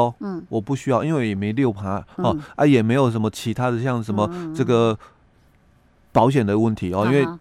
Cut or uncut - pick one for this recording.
uncut